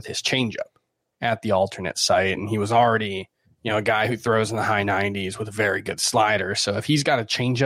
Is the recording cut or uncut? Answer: cut